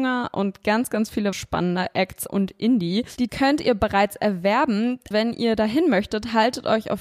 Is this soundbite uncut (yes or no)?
no